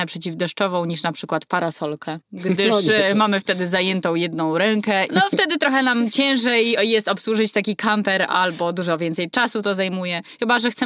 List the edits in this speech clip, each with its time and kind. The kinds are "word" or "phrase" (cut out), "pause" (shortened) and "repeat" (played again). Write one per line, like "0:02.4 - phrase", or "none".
0:02.2 - pause
0:05.1 - word

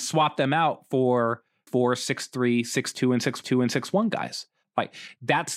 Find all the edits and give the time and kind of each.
0:01.7 - word
0:03.4 - repeat

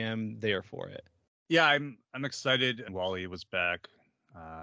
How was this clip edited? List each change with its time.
0:01.3 - pause
0:02.0 - pause
0:02.9 - phrase

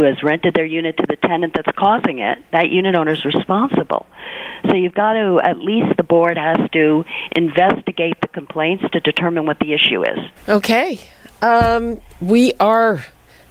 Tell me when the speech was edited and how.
0:10.4 - pause
0:12.1 - pause

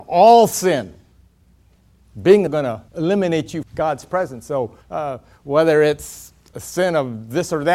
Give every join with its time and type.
0:02.5 - phrase
0:02.9 - pause
0:03.6 - word
0:04.8 - pause

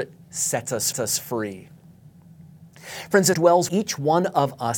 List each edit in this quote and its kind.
0:00.9 - repeat
0:03.3 - phrase
0:03.7 - word

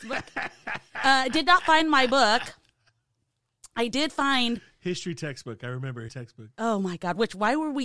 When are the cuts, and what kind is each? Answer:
0:06.1 - word

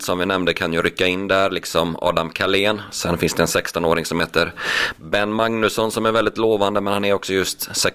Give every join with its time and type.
none

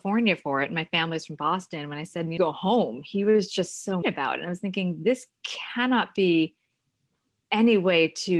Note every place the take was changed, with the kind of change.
0:02.4 - phrase
0:04.0 - word

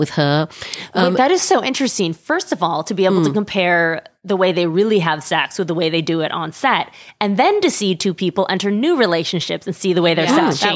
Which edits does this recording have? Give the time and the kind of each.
none

